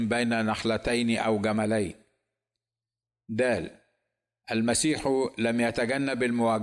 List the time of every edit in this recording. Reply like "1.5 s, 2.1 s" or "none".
none